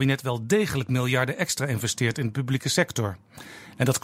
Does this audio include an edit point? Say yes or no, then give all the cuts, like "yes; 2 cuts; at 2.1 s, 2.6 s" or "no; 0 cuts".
no; 0 cuts